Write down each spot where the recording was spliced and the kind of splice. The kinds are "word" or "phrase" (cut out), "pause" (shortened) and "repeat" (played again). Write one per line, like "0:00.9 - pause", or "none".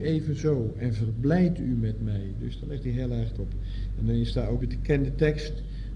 0:03.4 - word
0:04.6 - word